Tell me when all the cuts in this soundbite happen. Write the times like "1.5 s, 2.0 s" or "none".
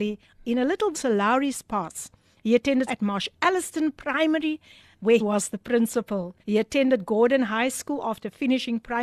0.9 s, 2.9 s, 5.2 s, 6.4 s

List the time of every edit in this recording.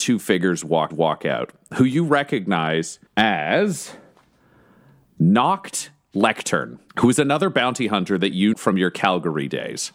0.9 s, 3.1 s, 6.9 s, 8.5 s

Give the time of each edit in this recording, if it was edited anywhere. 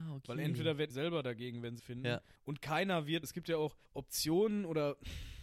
0.9 s, 1.8 s, 2.4 s, 3.2 s, 3.9 s

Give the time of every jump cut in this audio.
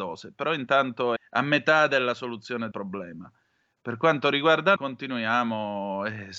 1.2 s, 2.7 s, 4.8 s

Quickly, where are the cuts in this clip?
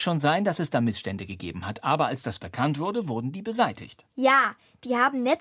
4.1 s

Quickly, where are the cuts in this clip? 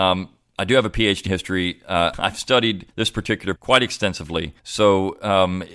1.3 s, 2.1 s, 2.9 s, 3.6 s, 4.6 s

